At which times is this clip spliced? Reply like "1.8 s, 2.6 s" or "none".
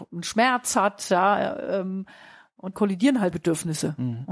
2.7 s, 3.3 s